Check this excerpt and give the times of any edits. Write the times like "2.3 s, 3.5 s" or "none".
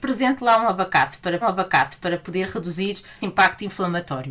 1.4 s, 3.2 s